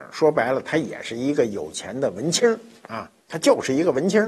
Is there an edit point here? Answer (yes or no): yes